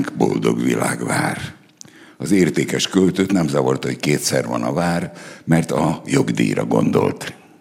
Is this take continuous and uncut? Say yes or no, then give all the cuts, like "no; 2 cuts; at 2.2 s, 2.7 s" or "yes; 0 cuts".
yes; 0 cuts